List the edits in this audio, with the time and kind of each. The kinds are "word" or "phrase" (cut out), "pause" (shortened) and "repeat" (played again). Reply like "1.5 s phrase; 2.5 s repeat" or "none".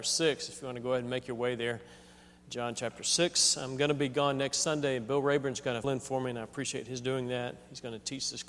5.8 s word